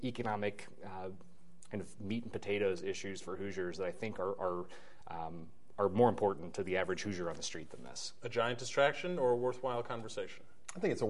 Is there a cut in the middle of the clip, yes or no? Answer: no